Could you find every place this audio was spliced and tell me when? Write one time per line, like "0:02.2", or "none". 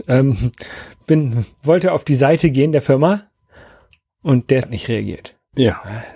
0:04.6